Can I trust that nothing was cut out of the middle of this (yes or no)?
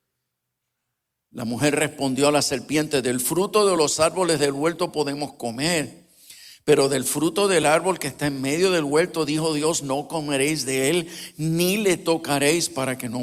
yes